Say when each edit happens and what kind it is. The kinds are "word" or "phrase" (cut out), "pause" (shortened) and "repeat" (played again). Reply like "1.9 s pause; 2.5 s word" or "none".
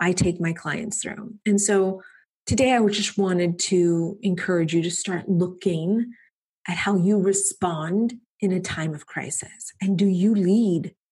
none